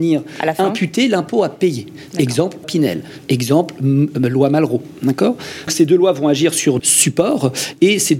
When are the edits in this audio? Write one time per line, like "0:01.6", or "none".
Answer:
0:02.6
0:05.7
0:06.8